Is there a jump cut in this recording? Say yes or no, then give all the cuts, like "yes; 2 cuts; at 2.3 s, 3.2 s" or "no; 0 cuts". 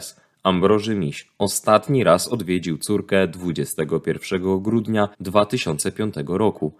yes; 1 cut; at 5.1 s